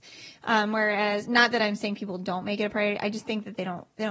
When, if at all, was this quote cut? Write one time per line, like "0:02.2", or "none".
none